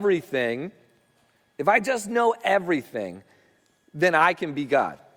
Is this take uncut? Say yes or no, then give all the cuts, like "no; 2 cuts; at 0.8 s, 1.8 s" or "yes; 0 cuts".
yes; 0 cuts